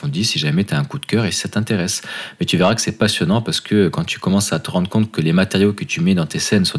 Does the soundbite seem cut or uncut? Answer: uncut